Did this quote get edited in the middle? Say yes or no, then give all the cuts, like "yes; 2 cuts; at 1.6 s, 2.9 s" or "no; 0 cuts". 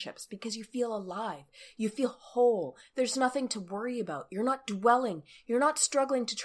no; 0 cuts